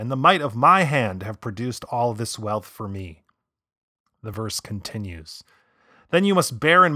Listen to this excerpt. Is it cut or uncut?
uncut